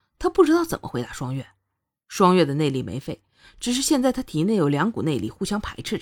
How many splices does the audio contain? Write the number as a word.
zero